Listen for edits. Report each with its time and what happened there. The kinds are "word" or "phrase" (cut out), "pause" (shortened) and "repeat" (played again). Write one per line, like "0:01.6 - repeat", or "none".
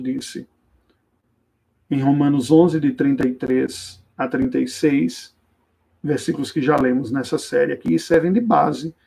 0:04.1 - pause
0:05.8 - pause